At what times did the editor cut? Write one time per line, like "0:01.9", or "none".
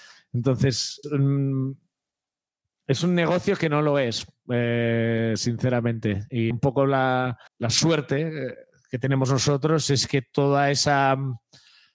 0:01.0
0:06.5
0:07.5